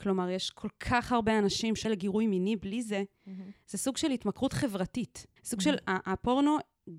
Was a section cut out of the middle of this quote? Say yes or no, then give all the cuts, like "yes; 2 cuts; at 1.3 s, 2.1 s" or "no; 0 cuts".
yes; 2 cuts; at 1.8 s, 5.4 s